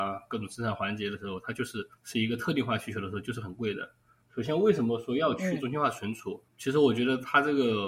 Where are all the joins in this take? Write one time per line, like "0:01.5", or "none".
0:02.0
0:04.2
0:06.5